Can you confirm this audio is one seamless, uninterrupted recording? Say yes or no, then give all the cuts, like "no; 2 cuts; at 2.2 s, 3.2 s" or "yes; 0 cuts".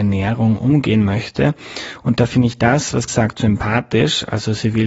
no; 1 cut; at 3.1 s